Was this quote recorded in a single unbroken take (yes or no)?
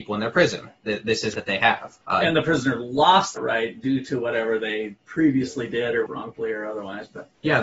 no